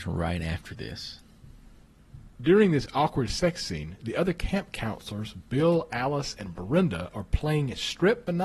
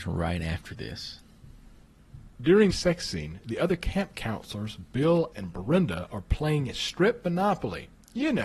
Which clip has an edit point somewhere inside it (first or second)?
second